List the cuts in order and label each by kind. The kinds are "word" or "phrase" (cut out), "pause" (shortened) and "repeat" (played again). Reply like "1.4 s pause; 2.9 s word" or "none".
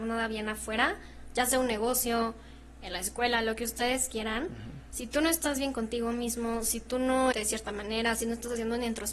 7.3 s phrase